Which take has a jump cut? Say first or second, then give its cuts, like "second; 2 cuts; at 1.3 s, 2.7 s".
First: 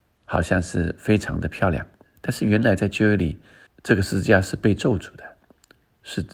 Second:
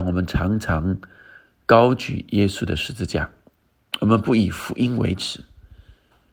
first; 2 cuts; at 2.0 s, 3.7 s